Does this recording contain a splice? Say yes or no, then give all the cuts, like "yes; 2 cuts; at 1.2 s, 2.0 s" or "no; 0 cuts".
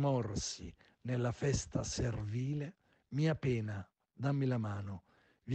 no; 0 cuts